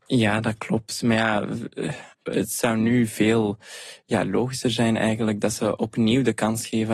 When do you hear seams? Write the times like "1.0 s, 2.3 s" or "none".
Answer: 2.1 s

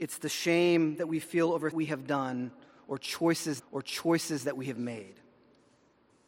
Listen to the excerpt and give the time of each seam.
1.7 s, 3.6 s

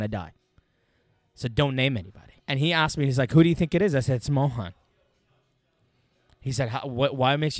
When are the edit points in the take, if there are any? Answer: 2.4 s

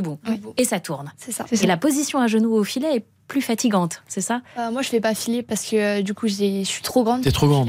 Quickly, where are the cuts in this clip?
none

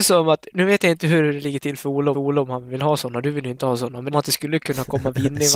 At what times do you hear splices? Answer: 2.1 s, 4.1 s

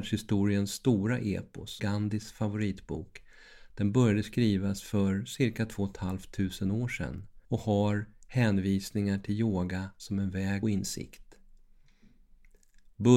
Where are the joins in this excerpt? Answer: 1.8 s, 7.4 s, 10.6 s

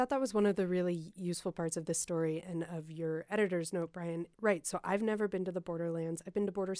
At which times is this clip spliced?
4.3 s

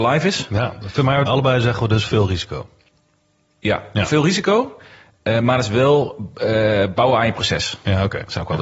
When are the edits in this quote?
1.3 s

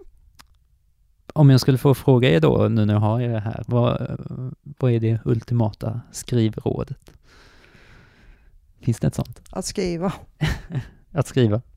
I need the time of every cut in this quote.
9.4 s

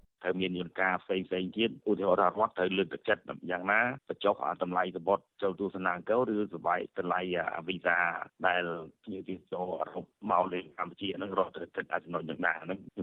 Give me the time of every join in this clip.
10.7 s

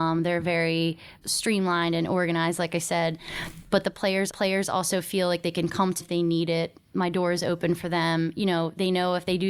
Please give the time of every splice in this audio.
1.2 s, 4.3 s, 6.0 s

